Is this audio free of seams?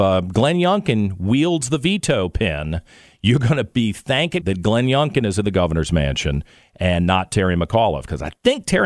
no; 1 cut; at 4.4 s

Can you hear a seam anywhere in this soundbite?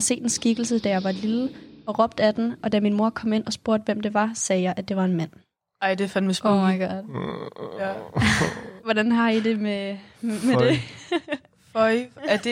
no; 0 cuts

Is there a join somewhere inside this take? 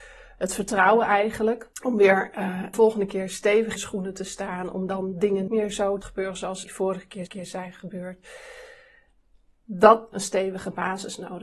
yes; 8 cuts; at 1.7 s, 2.7 s, 3.8 s, 5.5 s, 6.0 s, 6.6 s, 7.3 s, 10.1 s

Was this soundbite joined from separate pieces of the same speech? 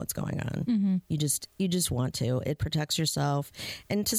no; 0 cuts

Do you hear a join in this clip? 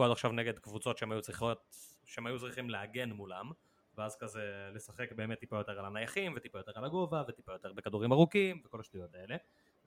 no; 0 cuts

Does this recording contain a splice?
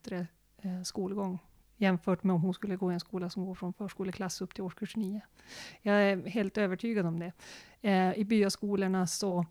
no; 0 cuts

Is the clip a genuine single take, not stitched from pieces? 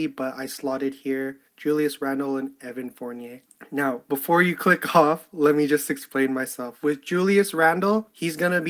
no; 1 cut; at 1.5 s

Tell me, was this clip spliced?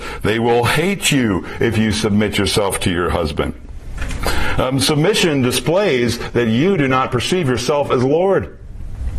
no; 0 cuts

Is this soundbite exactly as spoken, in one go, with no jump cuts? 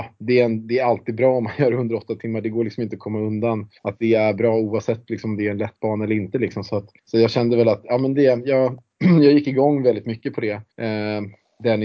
no; 3 cuts; at 3.8 s, 7.0 s, 10.7 s

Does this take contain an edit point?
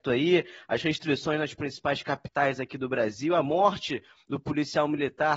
no; 0 cuts

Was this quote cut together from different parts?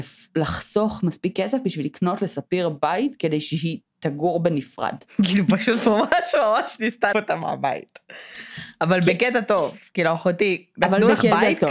yes; 1 cut; at 7.1 s

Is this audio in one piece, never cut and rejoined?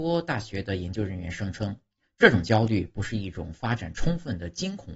yes; 0 cuts

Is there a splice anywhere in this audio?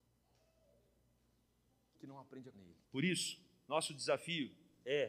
yes; 3 cuts; at 2.0 s, 2.5 s, 2.8 s

